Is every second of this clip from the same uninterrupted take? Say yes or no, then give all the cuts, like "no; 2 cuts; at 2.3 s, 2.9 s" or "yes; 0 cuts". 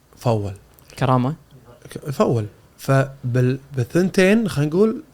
yes; 0 cuts